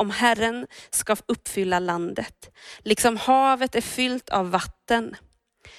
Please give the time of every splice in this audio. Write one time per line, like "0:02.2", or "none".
none